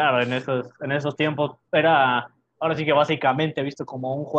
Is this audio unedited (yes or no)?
yes